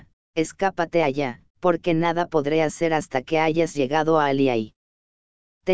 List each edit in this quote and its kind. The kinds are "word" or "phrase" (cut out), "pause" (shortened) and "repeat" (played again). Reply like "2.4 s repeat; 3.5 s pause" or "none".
1.5 s pause